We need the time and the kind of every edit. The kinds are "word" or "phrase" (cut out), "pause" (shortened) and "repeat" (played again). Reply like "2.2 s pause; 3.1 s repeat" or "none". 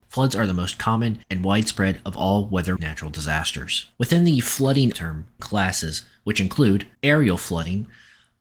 1.2 s pause; 2.8 s word; 3.9 s pause; 4.9 s word; 5.4 s phrase; 6.9 s pause